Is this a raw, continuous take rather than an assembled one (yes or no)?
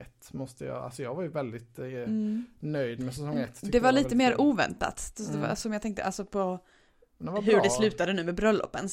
yes